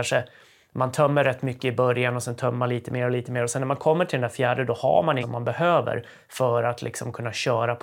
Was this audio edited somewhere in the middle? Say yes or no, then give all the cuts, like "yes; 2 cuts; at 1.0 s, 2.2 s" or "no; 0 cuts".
yes; 1 cut; at 5.2 s